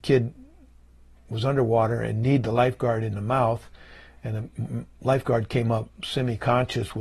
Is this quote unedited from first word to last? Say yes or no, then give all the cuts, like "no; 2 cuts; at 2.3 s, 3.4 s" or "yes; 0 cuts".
yes; 0 cuts